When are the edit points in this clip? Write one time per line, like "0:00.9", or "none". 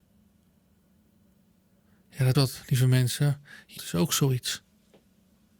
0:02.3
0:03.8